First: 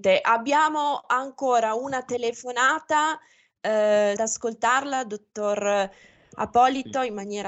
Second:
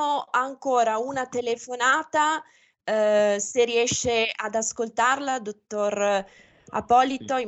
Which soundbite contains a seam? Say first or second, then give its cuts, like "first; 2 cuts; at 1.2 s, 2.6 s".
first; 1 cut; at 4.2 s